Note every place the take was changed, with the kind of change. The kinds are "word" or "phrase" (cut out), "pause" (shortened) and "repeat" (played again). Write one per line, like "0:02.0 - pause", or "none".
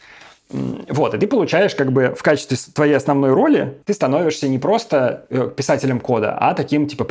0:03.8 - pause